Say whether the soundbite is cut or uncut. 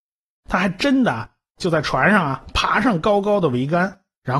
uncut